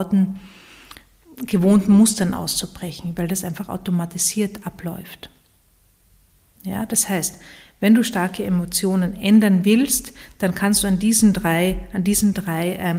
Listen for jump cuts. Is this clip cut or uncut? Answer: uncut